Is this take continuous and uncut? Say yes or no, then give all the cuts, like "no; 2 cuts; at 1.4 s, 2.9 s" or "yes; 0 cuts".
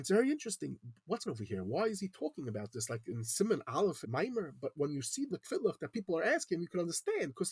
no; 3 cuts; at 1.3 s, 4.0 s, 5.3 s